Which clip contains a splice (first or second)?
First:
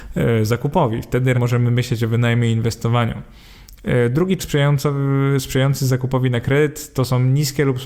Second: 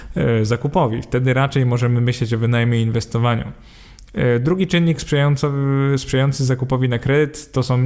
first